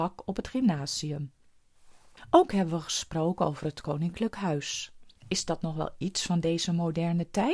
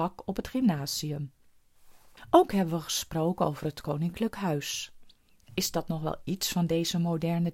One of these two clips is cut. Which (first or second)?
first